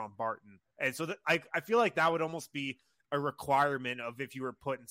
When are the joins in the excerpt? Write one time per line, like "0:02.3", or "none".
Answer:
none